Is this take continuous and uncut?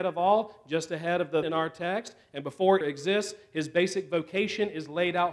no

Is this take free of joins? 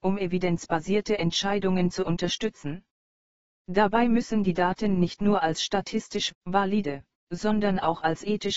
yes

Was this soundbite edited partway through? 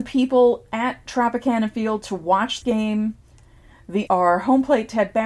yes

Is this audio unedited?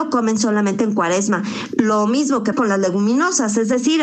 no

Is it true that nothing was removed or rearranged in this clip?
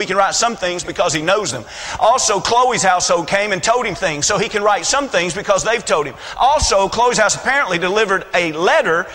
yes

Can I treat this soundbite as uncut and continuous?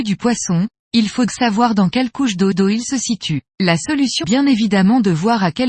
no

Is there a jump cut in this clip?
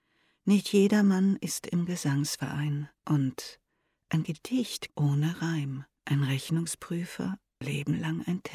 yes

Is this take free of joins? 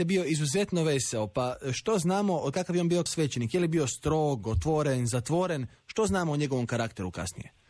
no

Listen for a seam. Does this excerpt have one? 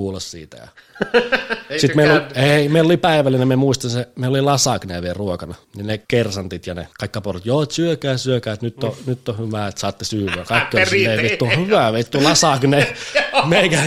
yes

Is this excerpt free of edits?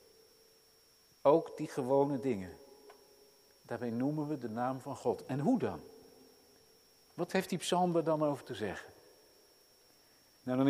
yes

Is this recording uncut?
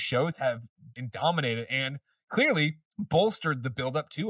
no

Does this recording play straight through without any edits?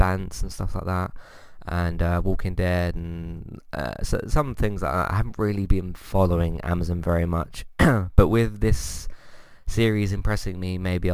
yes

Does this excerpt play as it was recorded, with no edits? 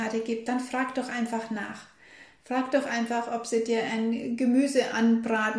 yes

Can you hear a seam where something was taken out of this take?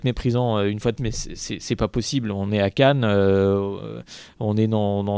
yes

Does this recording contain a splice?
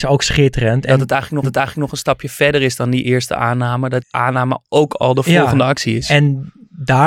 yes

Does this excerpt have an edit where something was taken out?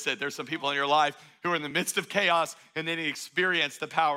no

